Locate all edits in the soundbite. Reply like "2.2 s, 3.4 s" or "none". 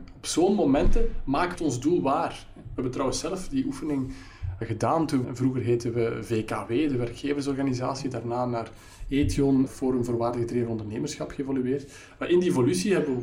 1.6 s, 4.6 s, 5.2 s, 9.7 s